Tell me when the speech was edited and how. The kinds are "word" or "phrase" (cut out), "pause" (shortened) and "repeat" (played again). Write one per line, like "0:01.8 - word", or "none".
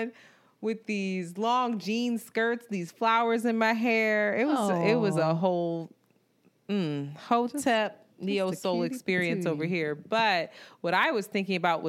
0:08.1 - pause